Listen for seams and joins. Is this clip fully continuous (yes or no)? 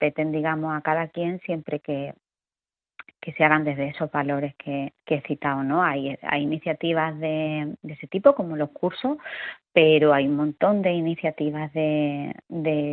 no